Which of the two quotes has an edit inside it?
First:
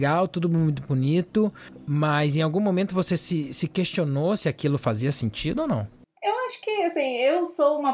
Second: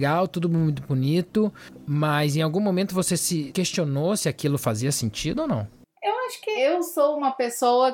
second; 2 cuts; at 3.5 s, 6.6 s

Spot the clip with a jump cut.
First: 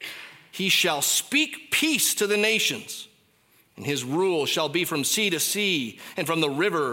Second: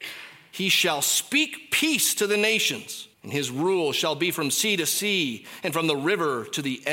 second; 1 cut; at 3.1 s

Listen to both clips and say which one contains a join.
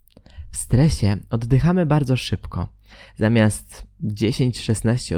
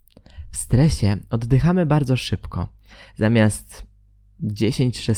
first; 1 cut; at 3.9 s

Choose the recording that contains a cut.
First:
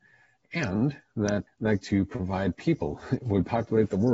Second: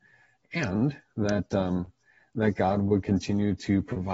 first; 2 cuts; at 1.5 s, 1.8 s

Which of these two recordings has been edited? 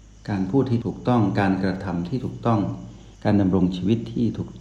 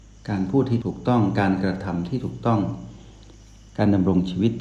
first; 1 cut; at 3.1 s

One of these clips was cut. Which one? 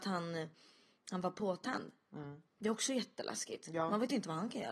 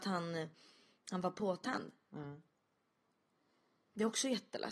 first; 1 cut; at 2.5 s

